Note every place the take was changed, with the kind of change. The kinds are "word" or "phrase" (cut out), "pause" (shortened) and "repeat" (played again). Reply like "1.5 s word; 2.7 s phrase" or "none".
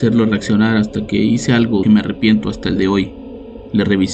1.8 s phrase; 2.8 s word